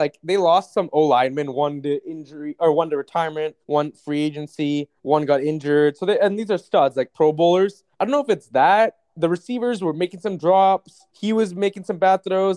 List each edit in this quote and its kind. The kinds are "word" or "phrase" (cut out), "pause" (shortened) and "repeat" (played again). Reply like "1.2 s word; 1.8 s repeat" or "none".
3.6 s pause; 5.0 s pause; 7.9 s pause; 11.1 s pause